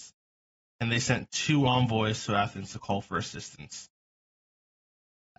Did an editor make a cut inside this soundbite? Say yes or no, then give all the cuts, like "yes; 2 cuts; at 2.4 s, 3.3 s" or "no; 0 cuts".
no; 0 cuts